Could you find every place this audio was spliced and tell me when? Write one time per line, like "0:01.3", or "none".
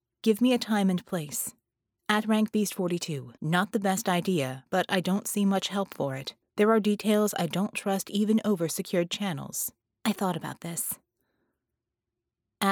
0:01.7
0:03.4
0:04.7
0:06.4
0:09.8